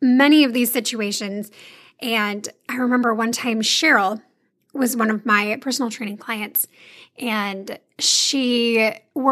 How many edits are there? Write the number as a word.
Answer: zero